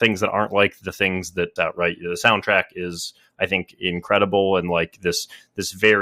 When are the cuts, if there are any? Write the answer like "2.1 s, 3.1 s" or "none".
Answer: 1.6 s